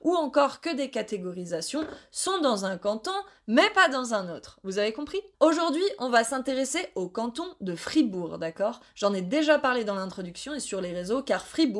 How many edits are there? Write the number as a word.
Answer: one